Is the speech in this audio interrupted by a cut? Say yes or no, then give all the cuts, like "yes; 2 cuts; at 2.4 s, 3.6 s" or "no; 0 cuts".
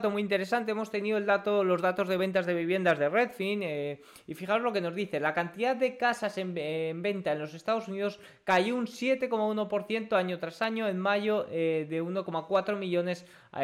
no; 0 cuts